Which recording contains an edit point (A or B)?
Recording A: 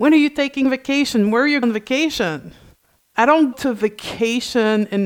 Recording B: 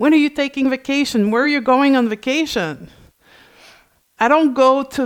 A